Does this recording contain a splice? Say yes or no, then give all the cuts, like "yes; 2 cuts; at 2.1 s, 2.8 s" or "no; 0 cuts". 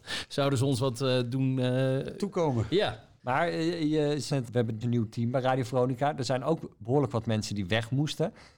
yes; 2 cuts; at 4.3 s, 4.8 s